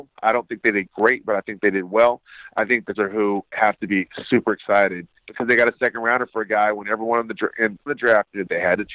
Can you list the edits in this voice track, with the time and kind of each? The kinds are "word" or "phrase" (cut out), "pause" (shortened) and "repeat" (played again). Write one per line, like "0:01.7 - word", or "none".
0:02.9 - word
0:05.2 - pause
0:07.9 - word